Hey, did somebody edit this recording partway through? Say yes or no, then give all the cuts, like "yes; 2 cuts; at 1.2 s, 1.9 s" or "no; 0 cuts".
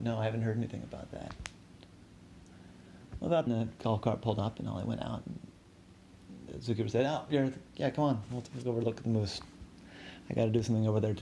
yes; 1 cut; at 3.5 s